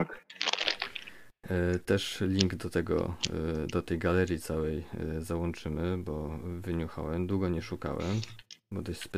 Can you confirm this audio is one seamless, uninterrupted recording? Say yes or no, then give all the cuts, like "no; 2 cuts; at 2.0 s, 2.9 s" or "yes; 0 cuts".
yes; 0 cuts